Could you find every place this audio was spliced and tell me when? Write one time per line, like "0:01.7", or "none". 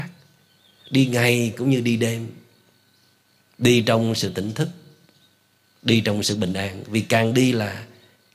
none